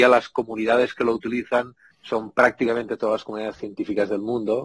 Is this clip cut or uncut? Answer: cut